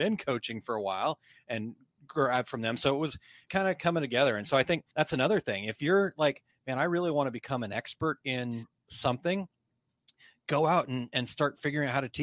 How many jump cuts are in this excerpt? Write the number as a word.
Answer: two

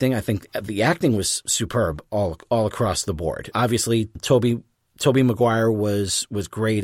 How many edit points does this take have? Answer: zero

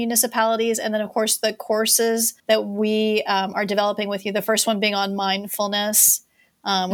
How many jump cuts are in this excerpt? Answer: one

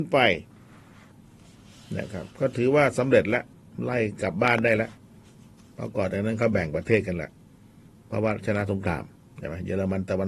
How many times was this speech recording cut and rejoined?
two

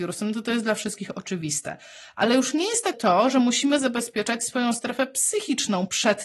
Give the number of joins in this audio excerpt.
one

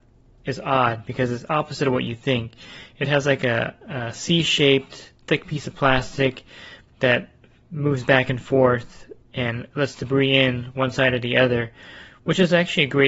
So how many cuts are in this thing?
one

